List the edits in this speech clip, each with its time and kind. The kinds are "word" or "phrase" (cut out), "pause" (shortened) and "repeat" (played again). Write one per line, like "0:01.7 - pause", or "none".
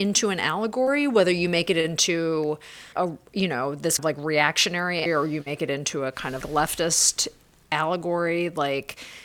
0:02.9 - word
0:04.0 - word
0:05.1 - word
0:06.4 - word